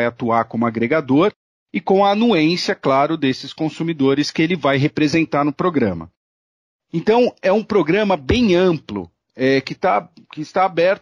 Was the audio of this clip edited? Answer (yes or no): no